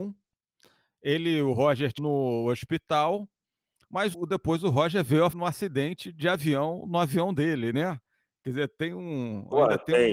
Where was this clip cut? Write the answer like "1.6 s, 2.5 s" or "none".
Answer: 2.0 s, 4.1 s, 5.3 s